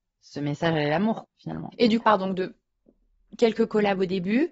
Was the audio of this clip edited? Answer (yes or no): yes